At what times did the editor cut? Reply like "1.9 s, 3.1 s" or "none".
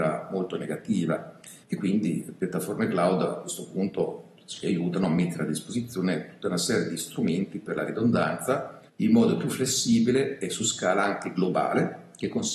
1.6 s, 8.9 s